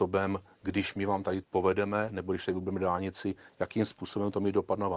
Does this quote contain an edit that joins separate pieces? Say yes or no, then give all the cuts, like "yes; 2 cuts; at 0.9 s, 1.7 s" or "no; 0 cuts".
yes; 1 cut; at 1.4 s